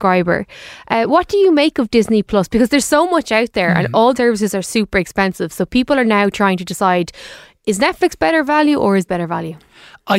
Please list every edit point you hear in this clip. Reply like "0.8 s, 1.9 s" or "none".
4.2 s, 9.1 s